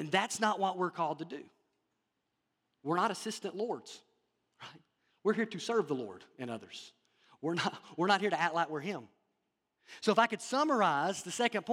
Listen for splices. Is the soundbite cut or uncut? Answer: uncut